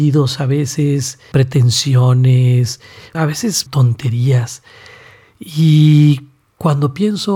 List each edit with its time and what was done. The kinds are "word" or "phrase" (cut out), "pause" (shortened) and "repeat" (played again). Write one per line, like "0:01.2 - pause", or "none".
0:01.3 - word
0:03.1 - word
0:03.7 - word